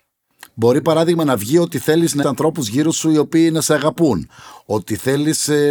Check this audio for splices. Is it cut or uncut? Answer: cut